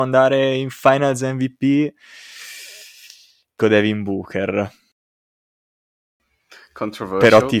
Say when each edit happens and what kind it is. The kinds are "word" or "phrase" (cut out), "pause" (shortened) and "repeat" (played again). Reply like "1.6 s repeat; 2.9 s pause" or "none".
3.6 s word